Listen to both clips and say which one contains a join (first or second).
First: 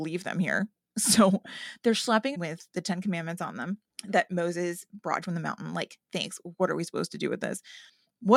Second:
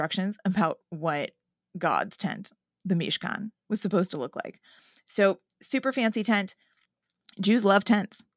first